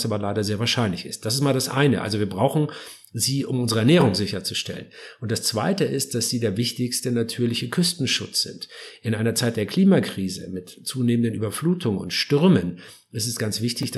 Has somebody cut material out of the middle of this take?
no; 0 cuts

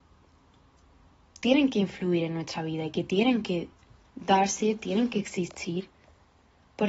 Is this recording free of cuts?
yes; 0 cuts

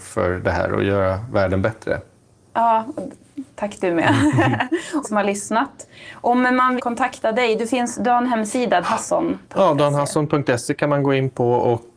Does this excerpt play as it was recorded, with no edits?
no; 5 cuts; at 3.5 s, 5.0 s, 6.8 s, 8.8 s, 9.4 s

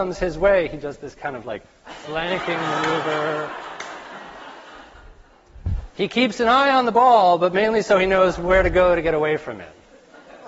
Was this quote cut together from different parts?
no; 0 cuts

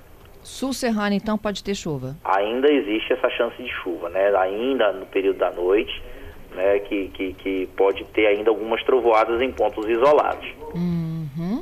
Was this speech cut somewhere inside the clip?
yes; 1 cut; at 2.2 s

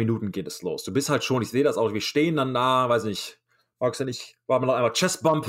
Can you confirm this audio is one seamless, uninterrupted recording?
yes; 0 cuts

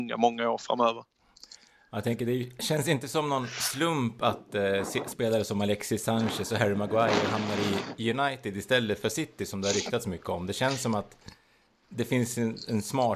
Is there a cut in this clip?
no; 0 cuts

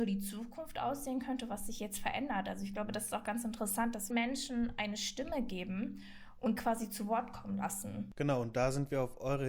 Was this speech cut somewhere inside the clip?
yes; 2 cuts; at 4.1 s, 6.6 s

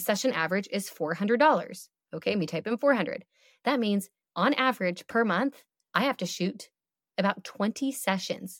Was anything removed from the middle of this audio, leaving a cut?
no; 0 cuts

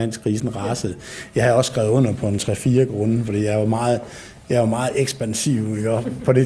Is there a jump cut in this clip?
no; 0 cuts

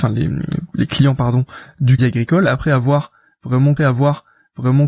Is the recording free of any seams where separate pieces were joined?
no; 2 cuts; at 2.0 s, 3.8 s

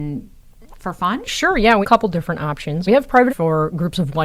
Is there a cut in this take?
yes; 2 cuts; at 1.8 s, 3.3 s

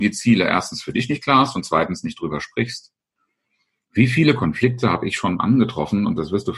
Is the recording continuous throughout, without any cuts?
yes; 0 cuts

